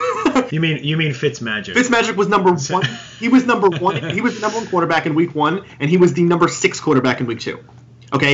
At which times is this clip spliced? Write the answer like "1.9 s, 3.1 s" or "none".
none